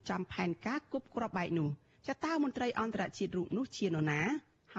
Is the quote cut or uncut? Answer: cut